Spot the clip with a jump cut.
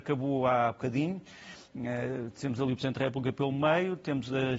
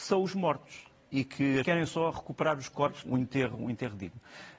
second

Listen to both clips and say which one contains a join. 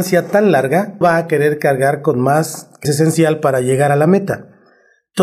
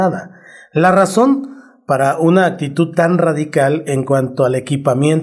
first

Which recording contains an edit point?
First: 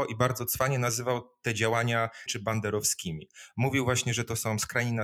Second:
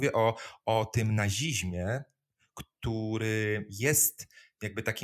first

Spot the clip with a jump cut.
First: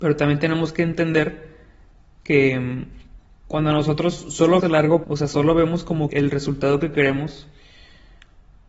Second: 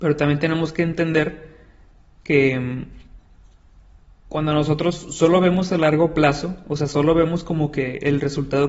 first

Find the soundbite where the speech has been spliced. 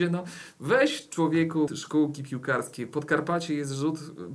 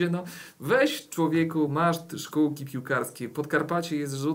first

